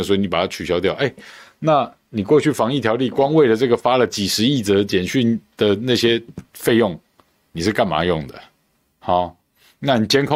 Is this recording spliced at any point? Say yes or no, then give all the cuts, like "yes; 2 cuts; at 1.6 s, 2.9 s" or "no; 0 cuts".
no; 0 cuts